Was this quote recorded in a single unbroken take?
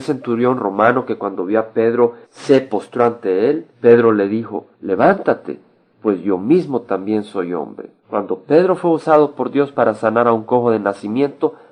no; 4 cuts; at 2.2 s, 3.7 s, 4.7 s, 8.0 s

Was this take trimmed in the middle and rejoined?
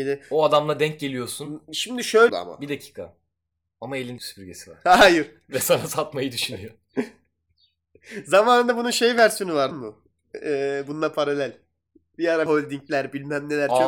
yes; 4 cuts; at 2.3 s, 4.2 s, 9.7 s, 12.5 s

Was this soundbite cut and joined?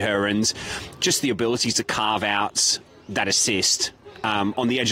no; 0 cuts

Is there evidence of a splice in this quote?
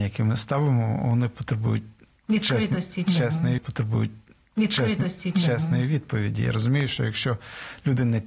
yes; 1 cut; at 3.6 s

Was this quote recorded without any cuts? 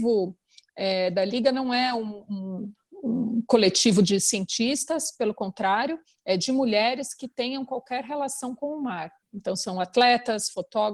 yes; 0 cuts

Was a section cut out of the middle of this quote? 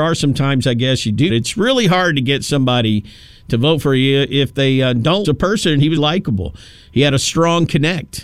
yes; 3 cuts; at 1.3 s, 5.2 s, 6.0 s

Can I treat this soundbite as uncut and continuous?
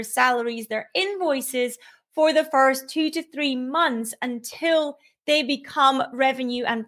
yes; 0 cuts

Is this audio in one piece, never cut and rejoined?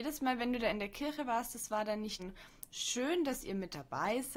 no; 1 cut; at 2.2 s

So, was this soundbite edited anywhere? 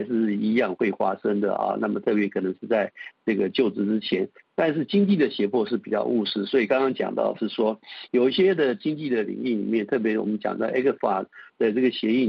no; 0 cuts

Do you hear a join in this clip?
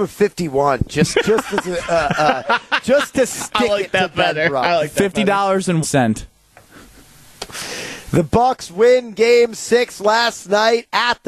yes; 1 cut; at 5.8 s

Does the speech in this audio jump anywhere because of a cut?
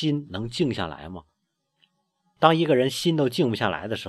no; 0 cuts

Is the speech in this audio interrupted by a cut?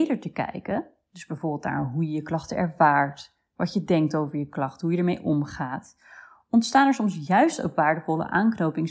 no; 0 cuts

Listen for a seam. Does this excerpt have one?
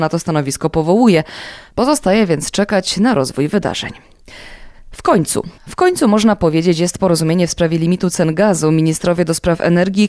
yes; 1 cut; at 5.6 s

